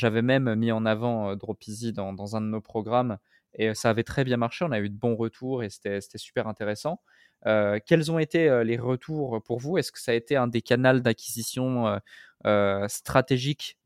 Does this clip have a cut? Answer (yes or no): no